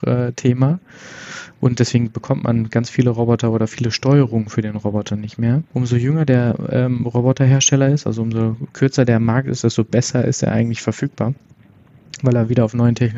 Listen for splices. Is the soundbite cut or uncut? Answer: cut